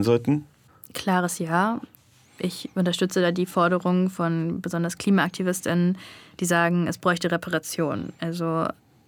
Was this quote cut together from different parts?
no; 0 cuts

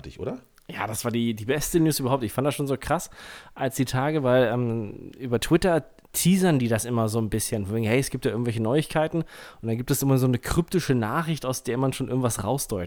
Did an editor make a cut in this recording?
no; 0 cuts

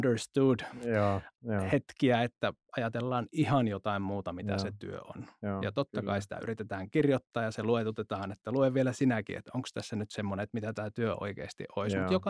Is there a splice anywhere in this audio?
no; 0 cuts

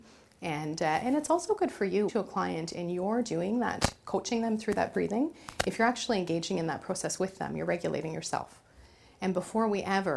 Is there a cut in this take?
yes; 1 cut; at 2.1 s

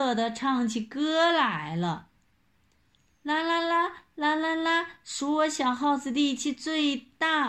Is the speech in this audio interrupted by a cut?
no; 0 cuts

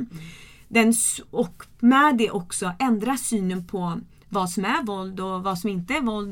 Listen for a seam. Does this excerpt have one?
no; 0 cuts

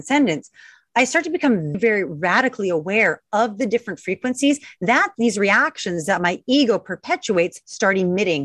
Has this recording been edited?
yes; 1 cut; at 1.7 s

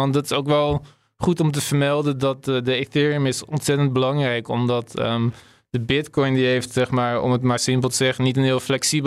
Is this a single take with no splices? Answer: yes; 0 cuts

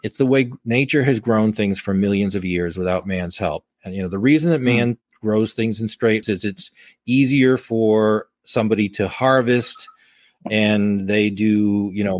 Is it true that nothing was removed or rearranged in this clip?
no; 1 cut; at 6.2 s

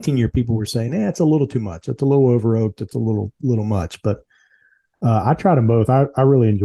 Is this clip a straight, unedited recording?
yes; 0 cuts

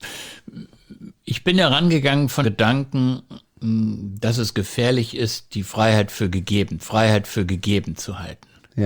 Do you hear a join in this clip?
yes; 2 cuts; at 2.4 s, 6.8 s

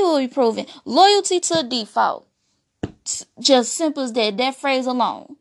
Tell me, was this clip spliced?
yes; 1 cut; at 2.7 s

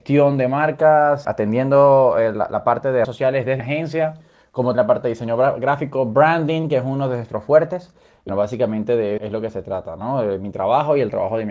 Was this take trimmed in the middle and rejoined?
yes; 6 cuts; at 1.2 s, 3.0 s, 3.6 s, 4.7 s, 8.3 s, 9.2 s

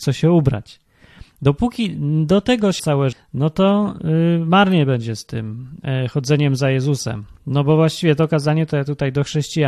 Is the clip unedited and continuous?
no; 2 cuts; at 2.8 s, 3.1 s

